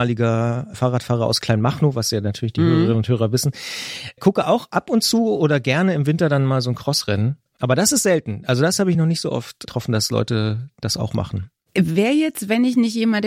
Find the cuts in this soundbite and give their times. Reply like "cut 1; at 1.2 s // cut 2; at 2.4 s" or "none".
none